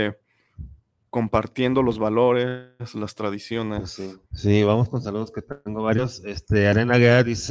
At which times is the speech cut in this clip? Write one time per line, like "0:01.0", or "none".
0:04.3